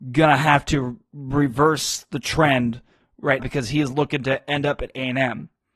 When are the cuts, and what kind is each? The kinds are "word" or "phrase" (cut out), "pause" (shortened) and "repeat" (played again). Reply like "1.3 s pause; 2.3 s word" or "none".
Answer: 3.4 s word